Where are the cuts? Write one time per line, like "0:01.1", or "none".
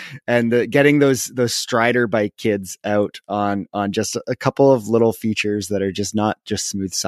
none